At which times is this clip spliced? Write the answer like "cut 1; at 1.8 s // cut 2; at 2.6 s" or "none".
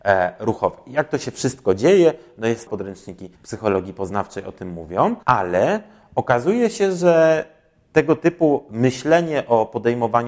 cut 1; at 2.7 s // cut 2; at 3.4 s // cut 3; at 5.2 s